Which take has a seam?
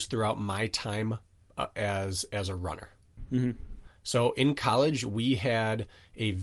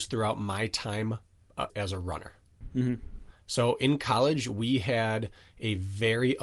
second; 1 cut; at 1.7 s

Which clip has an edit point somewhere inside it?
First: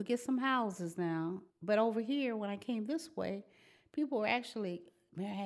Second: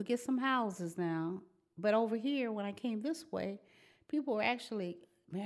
first; 1 cut; at 1.5 s

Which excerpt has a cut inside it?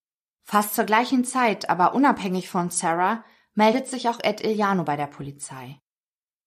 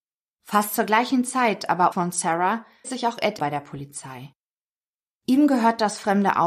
second; 3 cuts; at 1.9 s, 2.8 s, 3.4 s

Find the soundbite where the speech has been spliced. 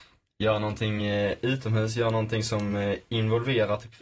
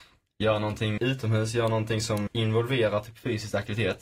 second; 2 cuts; at 1.0 s, 2.3 s

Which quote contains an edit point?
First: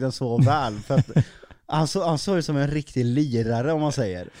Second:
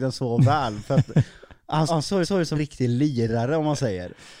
second; 3 cuts; at 1.9 s, 2.2 s, 2.5 s

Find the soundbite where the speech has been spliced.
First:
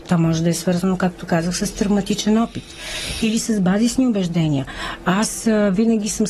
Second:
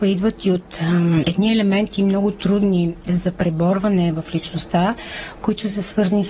second; 1 cut; at 1.2 s

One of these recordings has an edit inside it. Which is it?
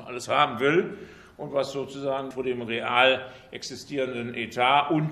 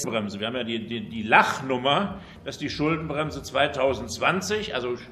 first; 1 cut; at 2.3 s

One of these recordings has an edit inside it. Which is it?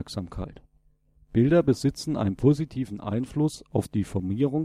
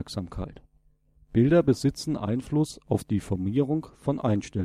second; 1 cut; at 2.2 s

